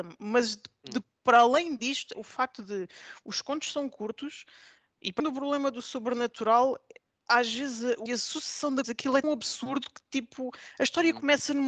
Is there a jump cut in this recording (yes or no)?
yes